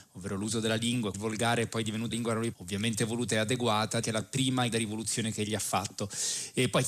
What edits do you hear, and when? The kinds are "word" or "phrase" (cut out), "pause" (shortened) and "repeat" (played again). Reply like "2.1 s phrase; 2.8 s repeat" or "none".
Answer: 1.1 s word; 2.1 s word; 2.5 s word; 4.0 s word; 4.7 s word